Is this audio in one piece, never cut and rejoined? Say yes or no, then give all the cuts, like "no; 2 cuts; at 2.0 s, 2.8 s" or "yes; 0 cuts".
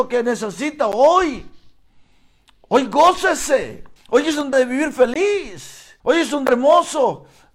no; 4 cuts; at 4.0 s, 4.5 s, 6.0 s, 6.5 s